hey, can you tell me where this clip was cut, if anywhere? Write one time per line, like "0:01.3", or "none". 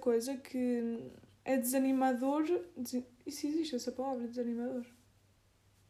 none